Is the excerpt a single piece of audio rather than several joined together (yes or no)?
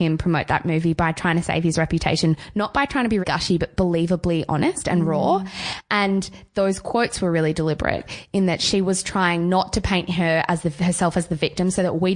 no